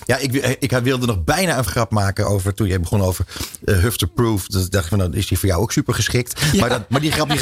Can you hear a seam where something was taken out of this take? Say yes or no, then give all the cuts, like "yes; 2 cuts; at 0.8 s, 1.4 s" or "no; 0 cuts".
yes; 1 cut; at 1.7 s